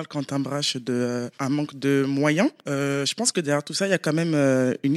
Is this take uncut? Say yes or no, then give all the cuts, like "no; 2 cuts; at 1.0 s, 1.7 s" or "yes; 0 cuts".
yes; 0 cuts